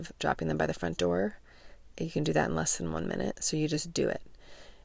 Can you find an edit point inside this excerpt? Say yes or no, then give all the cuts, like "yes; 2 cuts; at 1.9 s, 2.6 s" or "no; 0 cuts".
no; 0 cuts